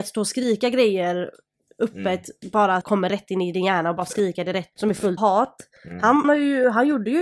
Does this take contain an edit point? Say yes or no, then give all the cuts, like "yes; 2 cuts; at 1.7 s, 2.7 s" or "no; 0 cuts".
yes; 4 cuts; at 2.8 s, 4.7 s, 5.2 s, 6.2 s